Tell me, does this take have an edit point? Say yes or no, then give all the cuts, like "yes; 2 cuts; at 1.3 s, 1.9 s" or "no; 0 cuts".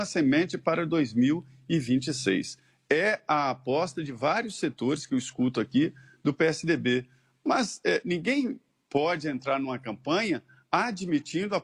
no; 0 cuts